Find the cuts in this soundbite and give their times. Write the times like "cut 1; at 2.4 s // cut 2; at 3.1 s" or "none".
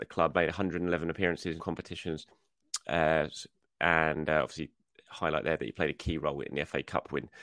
cut 1; at 1.6 s // cut 2; at 3.6 s

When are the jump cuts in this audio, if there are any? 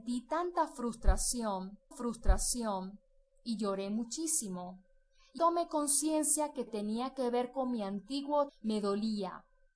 cut 1; at 1.9 s // cut 2; at 5.4 s // cut 3; at 6.7 s // cut 4; at 8.5 s

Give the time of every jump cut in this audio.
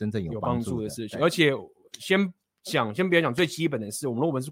none

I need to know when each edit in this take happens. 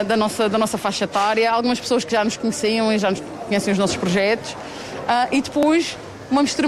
none

